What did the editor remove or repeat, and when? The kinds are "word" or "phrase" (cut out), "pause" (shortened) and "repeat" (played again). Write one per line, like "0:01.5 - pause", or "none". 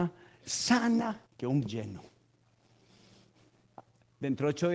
0:01.3 - pause
0:01.6 - word